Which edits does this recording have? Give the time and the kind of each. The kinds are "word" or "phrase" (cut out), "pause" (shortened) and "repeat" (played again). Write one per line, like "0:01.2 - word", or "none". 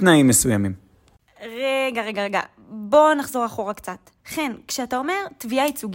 0:04.2 - pause